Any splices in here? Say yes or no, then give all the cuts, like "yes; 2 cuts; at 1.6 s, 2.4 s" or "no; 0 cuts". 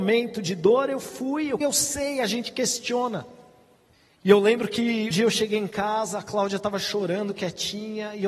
yes; 2 cuts; at 1.6 s, 5.1 s